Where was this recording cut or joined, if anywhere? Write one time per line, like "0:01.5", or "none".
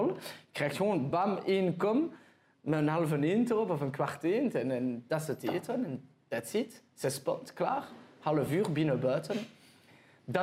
none